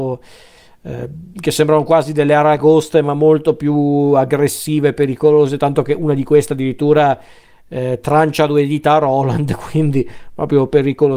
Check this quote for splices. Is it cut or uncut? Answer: uncut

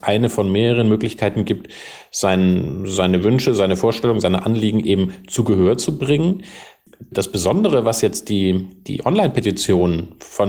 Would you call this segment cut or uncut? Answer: uncut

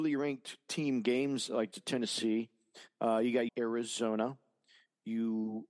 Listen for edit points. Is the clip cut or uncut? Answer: cut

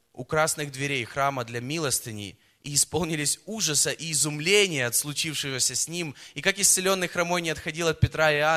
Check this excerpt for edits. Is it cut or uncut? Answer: uncut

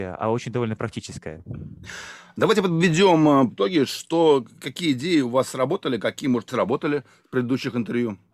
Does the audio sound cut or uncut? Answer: cut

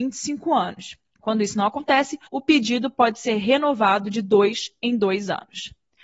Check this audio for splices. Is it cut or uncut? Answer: cut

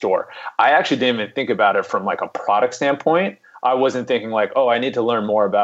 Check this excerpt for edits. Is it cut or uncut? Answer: uncut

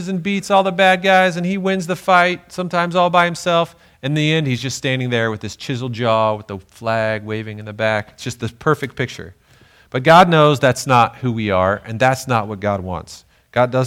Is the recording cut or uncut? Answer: uncut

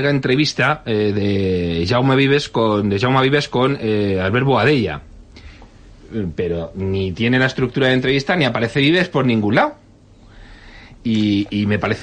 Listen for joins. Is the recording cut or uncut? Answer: uncut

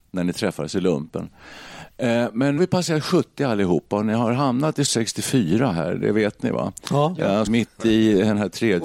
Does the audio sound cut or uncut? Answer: cut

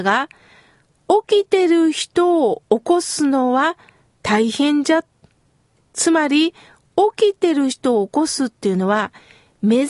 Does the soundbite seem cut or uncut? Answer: uncut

